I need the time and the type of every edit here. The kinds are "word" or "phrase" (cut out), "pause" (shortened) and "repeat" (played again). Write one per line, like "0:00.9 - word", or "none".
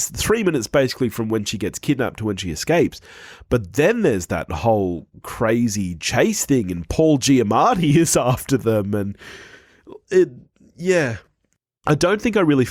none